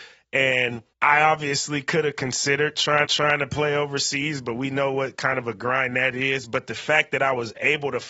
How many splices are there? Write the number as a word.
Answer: two